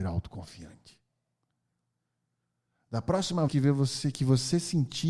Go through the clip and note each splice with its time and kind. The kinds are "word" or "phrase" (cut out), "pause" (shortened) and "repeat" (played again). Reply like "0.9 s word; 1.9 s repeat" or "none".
3.5 s word